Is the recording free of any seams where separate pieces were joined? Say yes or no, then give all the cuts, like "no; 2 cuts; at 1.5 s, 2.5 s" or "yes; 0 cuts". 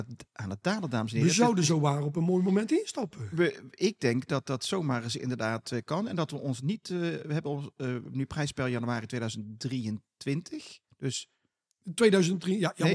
yes; 0 cuts